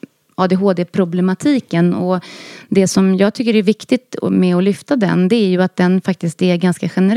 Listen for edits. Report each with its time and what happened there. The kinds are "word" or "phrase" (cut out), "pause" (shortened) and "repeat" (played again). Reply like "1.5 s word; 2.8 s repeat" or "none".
none

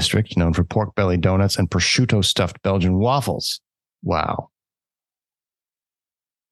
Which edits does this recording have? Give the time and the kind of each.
3.9 s pause

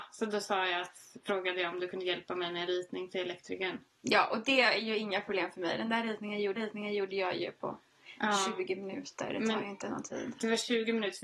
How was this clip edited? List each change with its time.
6.6 s repeat

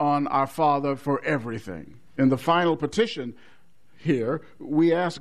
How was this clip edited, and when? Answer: 2.1 s pause

